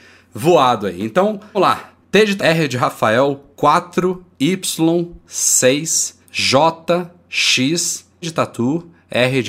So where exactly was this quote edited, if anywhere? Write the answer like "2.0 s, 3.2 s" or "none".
1.5 s, 2.0 s, 2.4 s, 3.5 s, 6.2 s, 8.2 s